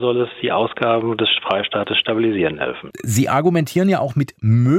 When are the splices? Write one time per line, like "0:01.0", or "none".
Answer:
none